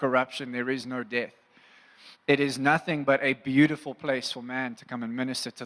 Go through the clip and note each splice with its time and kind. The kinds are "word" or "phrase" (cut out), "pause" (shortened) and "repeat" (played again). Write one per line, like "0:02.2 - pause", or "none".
none